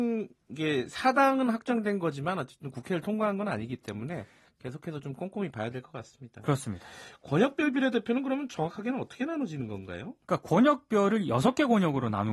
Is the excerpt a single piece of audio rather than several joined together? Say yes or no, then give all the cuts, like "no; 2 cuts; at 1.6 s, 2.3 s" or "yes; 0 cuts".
yes; 0 cuts